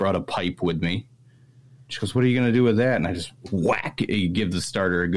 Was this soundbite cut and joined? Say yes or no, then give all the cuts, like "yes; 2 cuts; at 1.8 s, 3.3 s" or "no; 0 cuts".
no; 0 cuts